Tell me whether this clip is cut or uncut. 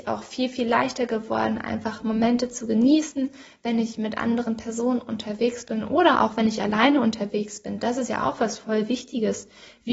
uncut